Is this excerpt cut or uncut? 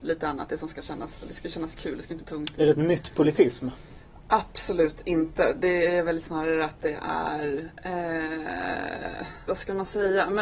cut